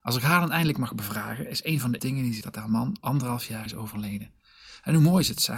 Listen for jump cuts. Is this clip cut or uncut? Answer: cut